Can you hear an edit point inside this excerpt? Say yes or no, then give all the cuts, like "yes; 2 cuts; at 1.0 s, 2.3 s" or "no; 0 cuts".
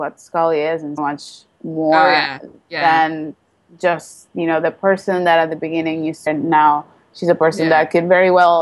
yes; 2 cuts; at 1.0 s, 6.3 s